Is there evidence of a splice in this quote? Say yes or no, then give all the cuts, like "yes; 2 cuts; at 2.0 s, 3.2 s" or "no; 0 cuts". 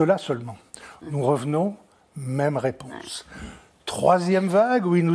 no; 0 cuts